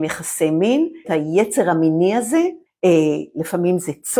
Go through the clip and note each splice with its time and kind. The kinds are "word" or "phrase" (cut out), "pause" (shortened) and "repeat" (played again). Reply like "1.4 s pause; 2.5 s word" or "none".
1.0 s phrase; 2.7 s pause